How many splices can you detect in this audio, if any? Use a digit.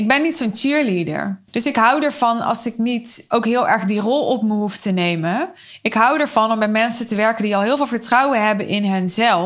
1